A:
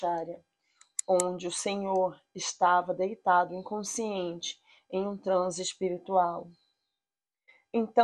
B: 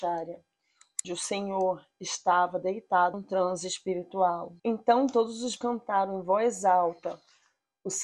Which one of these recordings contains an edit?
B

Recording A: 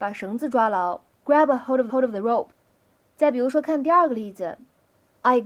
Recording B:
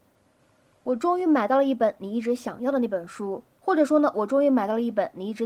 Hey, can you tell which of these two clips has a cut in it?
A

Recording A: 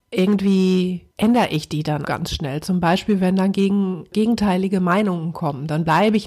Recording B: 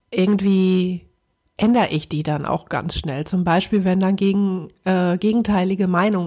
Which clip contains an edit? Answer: A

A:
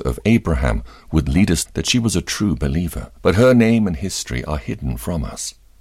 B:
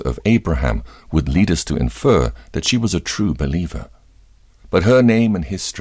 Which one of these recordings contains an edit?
A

